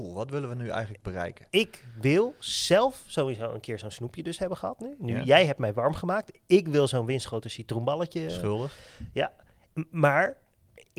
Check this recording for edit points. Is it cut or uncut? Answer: uncut